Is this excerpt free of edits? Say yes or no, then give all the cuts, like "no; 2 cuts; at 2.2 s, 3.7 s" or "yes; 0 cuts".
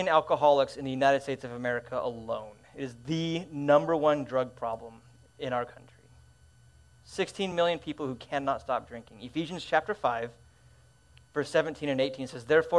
yes; 0 cuts